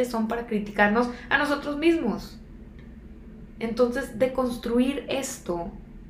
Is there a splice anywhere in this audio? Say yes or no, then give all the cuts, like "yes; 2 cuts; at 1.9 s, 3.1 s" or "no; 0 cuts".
no; 0 cuts